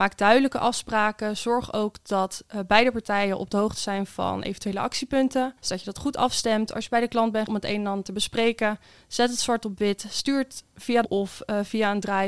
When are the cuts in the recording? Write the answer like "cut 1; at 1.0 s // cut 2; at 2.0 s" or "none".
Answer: cut 1; at 5.6 s // cut 2; at 7.5 s // cut 3; at 11.0 s